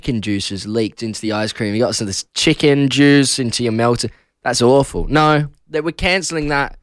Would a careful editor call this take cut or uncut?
uncut